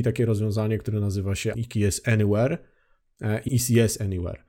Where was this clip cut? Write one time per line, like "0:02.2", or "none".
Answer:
0:01.5
0:03.5